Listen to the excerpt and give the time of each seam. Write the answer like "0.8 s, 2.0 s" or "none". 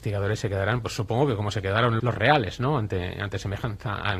2.0 s